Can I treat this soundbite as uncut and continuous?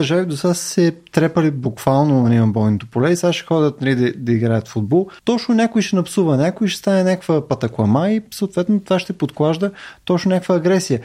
no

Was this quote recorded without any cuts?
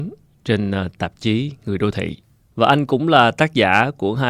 no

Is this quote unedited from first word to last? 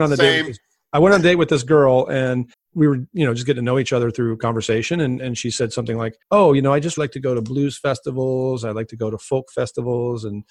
no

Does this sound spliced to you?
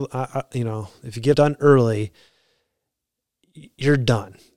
yes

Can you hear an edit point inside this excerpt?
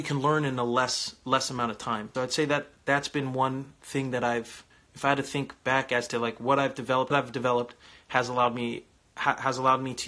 yes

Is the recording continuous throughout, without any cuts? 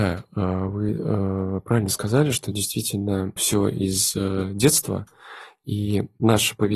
no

